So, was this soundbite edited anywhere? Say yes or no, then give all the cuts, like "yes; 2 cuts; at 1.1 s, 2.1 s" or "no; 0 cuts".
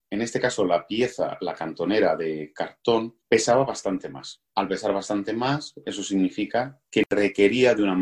yes; 2 cuts; at 3.2 s, 4.5 s